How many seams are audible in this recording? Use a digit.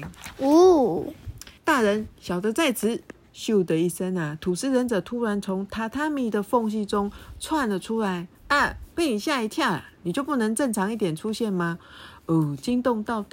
2